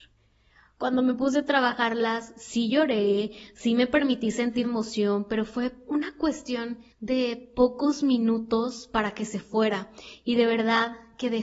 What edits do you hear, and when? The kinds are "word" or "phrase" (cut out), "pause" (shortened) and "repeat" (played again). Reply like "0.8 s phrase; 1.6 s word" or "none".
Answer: 4.6 s word; 6.9 s pause